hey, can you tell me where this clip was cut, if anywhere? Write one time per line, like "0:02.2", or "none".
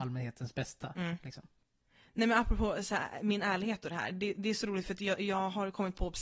none